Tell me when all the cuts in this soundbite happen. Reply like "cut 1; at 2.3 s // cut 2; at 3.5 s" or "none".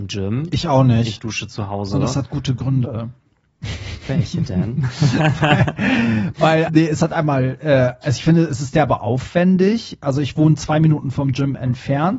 cut 1; at 6.7 s